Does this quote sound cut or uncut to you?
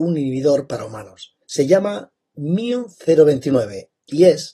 cut